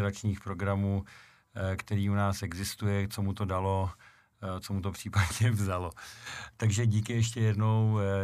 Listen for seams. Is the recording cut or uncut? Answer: uncut